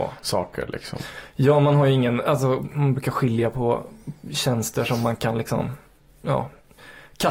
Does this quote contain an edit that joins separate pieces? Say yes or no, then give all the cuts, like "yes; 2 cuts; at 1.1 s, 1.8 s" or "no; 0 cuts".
no; 0 cuts